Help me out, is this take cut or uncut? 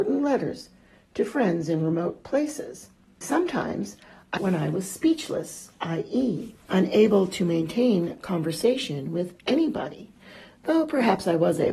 cut